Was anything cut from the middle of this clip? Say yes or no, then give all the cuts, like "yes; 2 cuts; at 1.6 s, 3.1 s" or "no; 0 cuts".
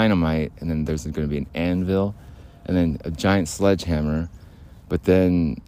no; 0 cuts